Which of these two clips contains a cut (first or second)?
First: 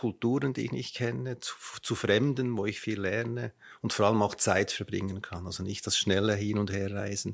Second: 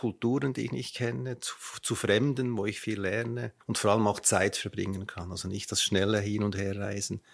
second